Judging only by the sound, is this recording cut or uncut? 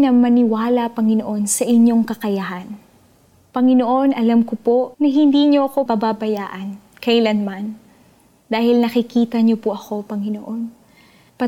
cut